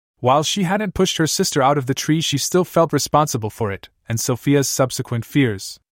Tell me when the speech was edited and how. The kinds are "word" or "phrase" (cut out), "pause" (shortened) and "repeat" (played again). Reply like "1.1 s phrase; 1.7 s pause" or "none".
none